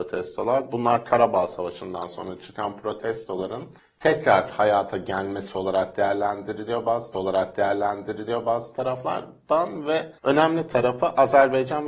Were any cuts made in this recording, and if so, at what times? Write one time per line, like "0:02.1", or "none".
0:03.8
0:07.1
0:10.2